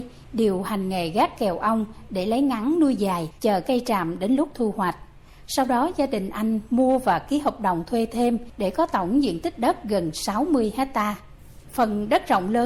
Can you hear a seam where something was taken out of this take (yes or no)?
no